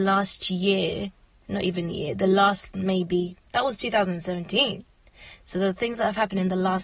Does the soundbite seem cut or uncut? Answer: uncut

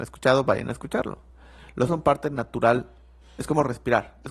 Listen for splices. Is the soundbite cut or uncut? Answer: cut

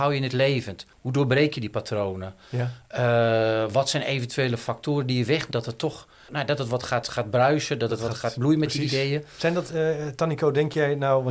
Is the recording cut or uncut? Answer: cut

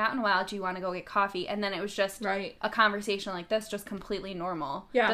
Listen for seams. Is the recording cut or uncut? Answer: uncut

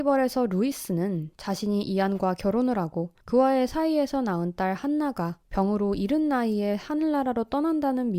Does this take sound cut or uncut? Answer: cut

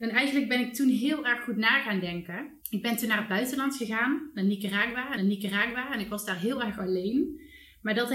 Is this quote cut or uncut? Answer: cut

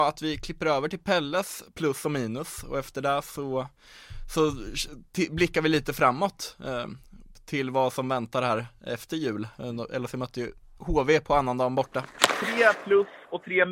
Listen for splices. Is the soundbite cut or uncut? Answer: uncut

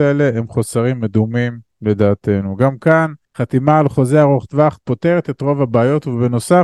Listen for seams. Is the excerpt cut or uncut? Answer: cut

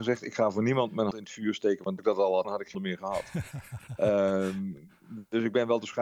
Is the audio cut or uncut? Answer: cut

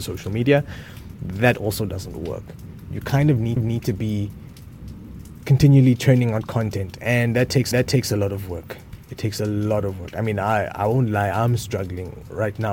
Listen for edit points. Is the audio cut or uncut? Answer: cut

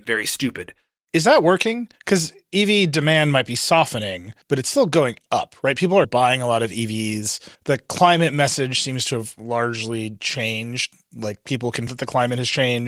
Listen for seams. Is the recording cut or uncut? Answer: cut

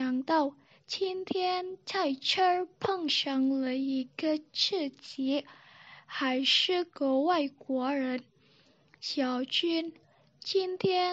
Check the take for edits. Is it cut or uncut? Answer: uncut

